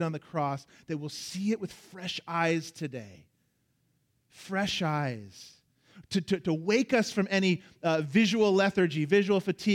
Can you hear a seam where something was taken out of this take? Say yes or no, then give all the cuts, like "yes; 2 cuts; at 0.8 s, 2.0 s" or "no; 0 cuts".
no; 0 cuts